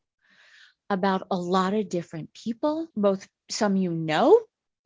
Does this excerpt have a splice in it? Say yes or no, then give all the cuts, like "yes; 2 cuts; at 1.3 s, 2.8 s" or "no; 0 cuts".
yes; 1 cut; at 2.9 s